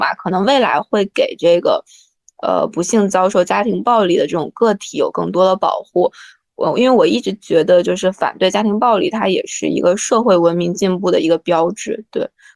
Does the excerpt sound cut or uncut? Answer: uncut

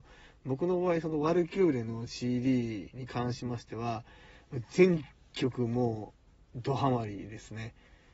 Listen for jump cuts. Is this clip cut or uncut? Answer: uncut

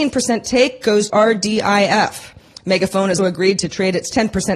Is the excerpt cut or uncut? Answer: cut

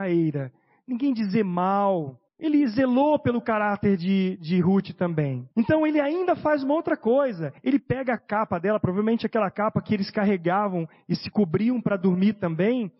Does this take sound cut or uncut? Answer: cut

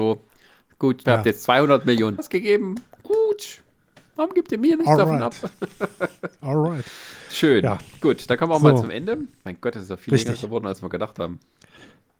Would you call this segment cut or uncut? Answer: cut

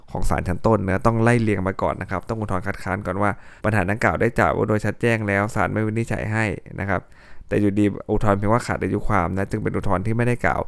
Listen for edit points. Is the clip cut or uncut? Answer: cut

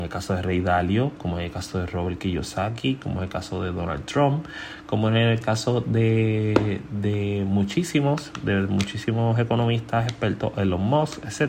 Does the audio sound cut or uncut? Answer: uncut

